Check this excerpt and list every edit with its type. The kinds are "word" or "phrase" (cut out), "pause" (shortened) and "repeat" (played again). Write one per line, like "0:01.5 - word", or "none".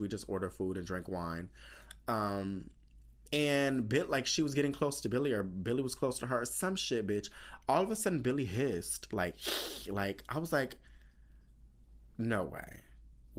none